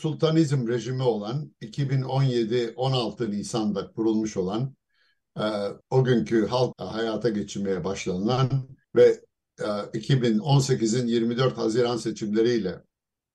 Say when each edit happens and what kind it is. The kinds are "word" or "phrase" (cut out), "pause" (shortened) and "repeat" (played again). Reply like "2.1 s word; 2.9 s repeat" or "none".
5.8 s pause; 6.7 s word; 8.8 s pause